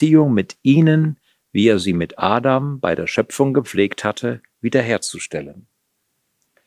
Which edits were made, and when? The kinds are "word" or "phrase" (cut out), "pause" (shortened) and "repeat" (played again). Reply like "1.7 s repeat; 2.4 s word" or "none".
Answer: none

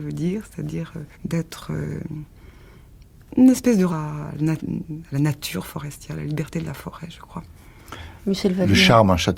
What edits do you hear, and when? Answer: 1.1 s pause; 3.9 s word; 5.1 s pause

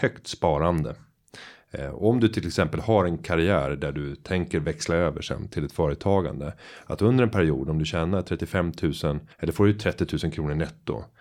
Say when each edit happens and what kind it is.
9.3 s pause

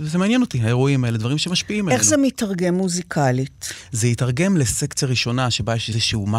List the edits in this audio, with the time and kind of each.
none

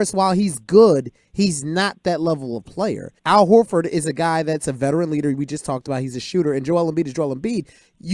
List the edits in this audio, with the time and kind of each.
3.2 s pause

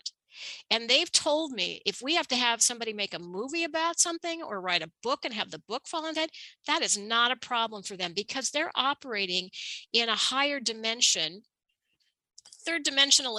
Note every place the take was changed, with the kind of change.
6.2 s word

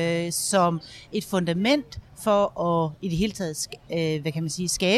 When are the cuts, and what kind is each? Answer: none

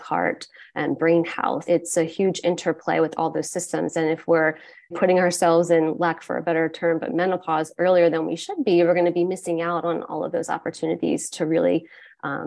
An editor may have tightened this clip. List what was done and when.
1.7 s word; 4.9 s word

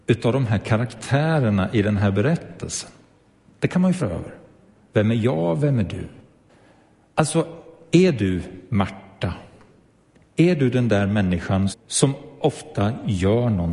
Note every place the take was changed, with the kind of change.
4.0 s word; 11.7 s word

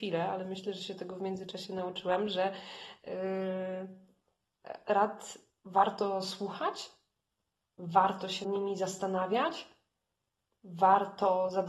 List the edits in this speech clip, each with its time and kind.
4.8 s word; 8.4 s word

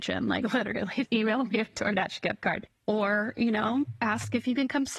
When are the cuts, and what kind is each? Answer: 1.0 s word

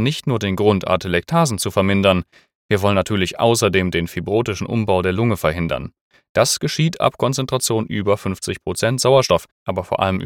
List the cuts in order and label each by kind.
none

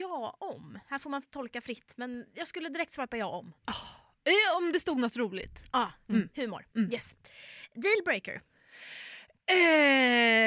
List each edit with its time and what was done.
none

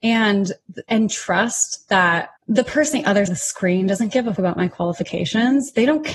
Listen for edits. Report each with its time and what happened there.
2.4 s pause; 2.9 s word; 3.3 s word; 4.4 s word

